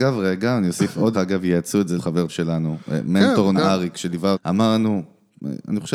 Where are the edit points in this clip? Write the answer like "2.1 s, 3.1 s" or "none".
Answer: 1.1 s, 2.0 s, 2.3 s, 3.5 s, 4.3 s